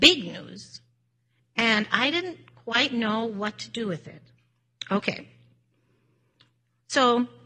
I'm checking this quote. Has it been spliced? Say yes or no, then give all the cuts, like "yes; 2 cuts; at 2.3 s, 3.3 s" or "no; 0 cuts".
no; 0 cuts